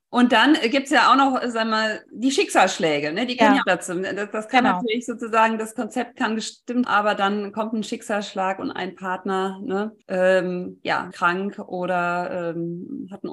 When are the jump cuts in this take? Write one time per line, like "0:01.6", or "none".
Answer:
0:02.1
0:03.6
0:06.8
0:10.0
0:11.1